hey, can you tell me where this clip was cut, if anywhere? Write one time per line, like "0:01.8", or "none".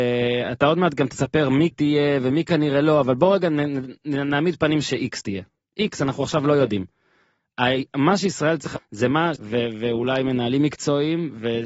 0:01.7
0:08.8
0:09.4